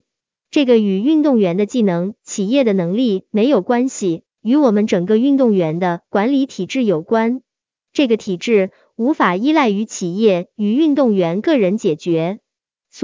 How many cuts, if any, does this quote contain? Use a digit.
0